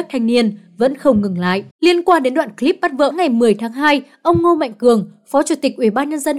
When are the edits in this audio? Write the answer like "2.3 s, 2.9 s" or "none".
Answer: 1.7 s, 3.1 s